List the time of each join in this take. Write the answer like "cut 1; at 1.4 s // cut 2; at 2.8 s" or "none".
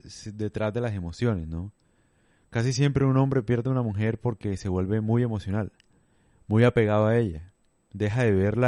none